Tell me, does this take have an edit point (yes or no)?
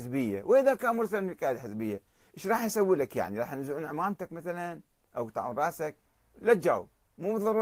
no